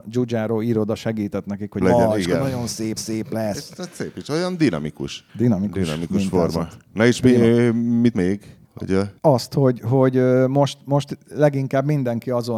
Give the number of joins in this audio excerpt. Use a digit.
6